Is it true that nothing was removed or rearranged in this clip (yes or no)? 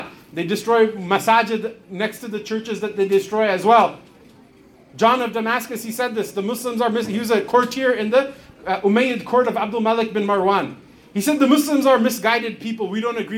yes